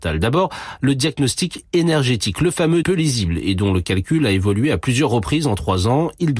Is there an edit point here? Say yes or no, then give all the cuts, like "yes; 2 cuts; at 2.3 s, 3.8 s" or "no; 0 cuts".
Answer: yes; 1 cut; at 2.8 s